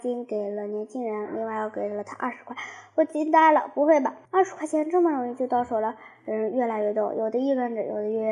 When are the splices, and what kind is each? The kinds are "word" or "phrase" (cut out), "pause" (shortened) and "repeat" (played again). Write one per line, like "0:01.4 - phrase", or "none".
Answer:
0:04.3 - pause